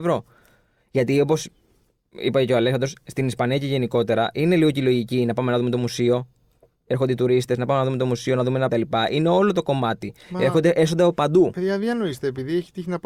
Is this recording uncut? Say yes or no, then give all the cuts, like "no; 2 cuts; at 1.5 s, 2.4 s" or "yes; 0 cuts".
no; 1 cut; at 8.7 s